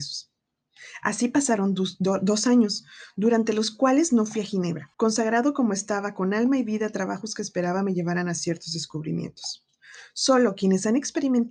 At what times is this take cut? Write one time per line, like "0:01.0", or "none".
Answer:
0:04.9